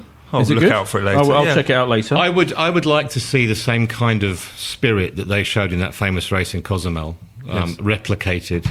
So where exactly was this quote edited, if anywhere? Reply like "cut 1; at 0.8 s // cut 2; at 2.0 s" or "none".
none